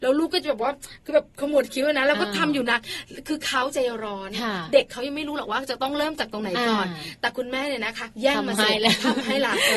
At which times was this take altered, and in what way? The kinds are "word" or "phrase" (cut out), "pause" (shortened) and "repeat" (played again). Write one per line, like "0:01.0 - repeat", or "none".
0:08.1 - pause